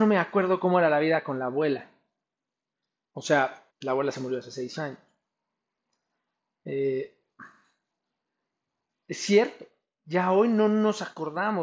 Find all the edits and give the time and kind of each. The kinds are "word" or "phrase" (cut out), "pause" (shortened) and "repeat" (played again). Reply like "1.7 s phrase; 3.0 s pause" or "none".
3.7 s pause